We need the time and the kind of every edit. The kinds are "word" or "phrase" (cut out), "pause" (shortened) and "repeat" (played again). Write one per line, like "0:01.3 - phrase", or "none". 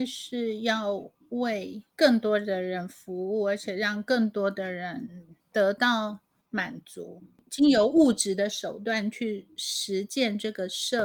0:01.9 - pause